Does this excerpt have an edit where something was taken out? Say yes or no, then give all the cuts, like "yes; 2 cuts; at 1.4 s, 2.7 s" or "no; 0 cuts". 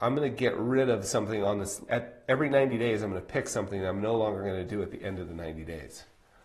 yes; 1 cut; at 1.9 s